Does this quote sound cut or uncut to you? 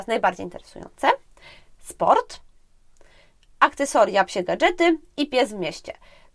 uncut